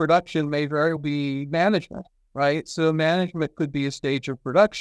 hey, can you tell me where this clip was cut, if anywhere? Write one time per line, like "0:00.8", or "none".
0:01.0